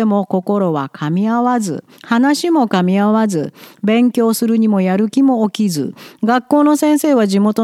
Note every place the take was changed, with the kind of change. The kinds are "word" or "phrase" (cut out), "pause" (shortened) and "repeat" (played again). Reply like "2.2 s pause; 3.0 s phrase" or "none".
1.9 s pause